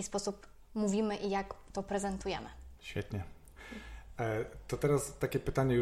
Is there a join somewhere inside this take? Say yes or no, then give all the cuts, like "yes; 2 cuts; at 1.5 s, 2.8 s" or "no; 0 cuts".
yes; 1 cut; at 2.8 s